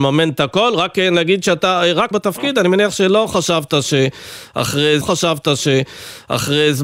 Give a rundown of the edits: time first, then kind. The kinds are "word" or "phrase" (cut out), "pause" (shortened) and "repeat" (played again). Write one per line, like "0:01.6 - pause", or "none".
0:02.1 - word
0:05.0 - repeat